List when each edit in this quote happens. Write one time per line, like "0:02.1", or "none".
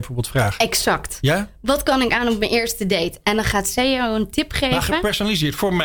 none